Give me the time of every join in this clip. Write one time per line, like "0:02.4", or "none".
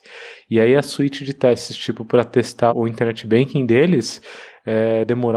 0:02.7